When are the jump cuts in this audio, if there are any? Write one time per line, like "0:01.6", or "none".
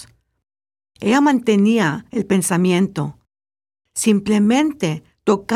none

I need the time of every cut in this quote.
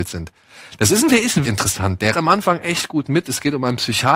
0:01.1
0:01.4
0:02.1

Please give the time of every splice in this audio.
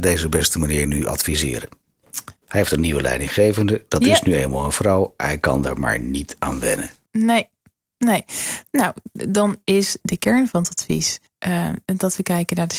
0:02.4
0:10.0
0:11.3

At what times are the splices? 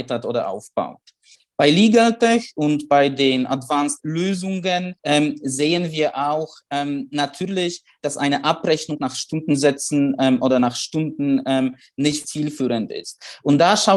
0:01.3
0:04.0
0:05.0
0:12.2

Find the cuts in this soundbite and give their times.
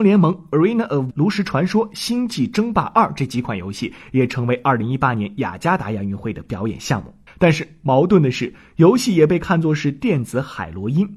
0:01.1
0:07.3

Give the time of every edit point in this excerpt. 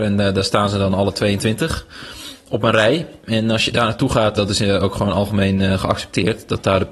0:04.4

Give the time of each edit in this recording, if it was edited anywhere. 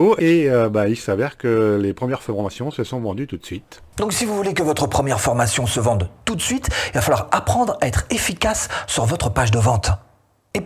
none

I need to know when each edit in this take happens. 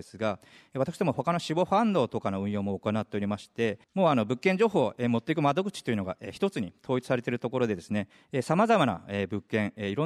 0:03.8

